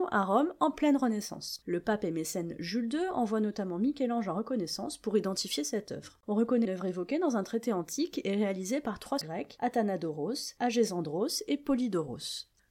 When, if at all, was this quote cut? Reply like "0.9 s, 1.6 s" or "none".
6.2 s, 6.6 s, 9.2 s